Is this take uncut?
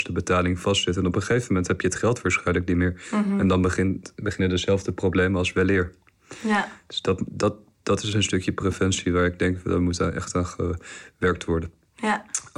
yes; 0 cuts

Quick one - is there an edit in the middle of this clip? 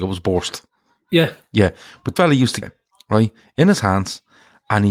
yes; 2 cuts; at 2.2 s, 2.6 s

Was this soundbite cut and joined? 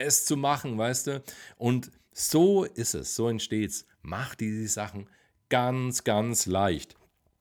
no; 0 cuts

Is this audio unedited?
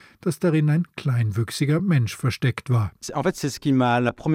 yes; 0 cuts

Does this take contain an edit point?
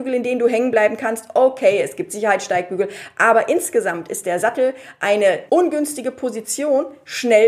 yes; 1 cut; at 5.5 s

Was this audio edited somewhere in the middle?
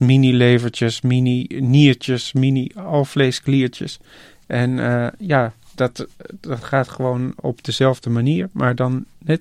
no; 0 cuts

